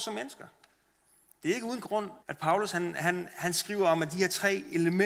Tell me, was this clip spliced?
yes; 1 cut; at 2.2 s

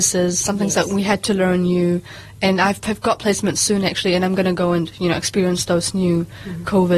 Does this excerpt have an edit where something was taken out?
no; 0 cuts

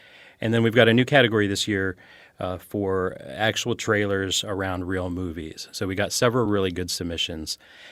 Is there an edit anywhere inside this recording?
no; 0 cuts

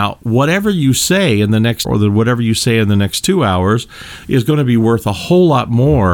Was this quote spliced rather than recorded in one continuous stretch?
yes; 1 cut; at 1.8 s

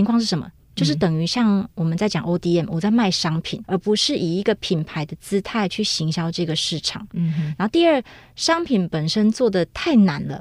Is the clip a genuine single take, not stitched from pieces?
no; 1 cut; at 3.6 s

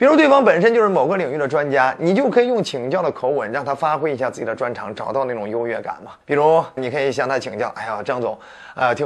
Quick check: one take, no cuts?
no; 2 cuts; at 6.2 s, 6.8 s

